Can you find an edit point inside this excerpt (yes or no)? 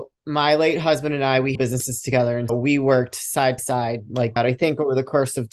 yes